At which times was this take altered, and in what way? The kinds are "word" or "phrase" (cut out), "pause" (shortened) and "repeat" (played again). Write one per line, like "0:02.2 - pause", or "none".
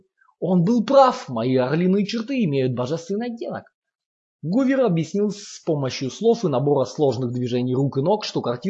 none